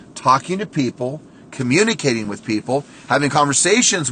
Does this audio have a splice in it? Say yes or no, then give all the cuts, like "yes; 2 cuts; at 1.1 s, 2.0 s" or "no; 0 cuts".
no; 0 cuts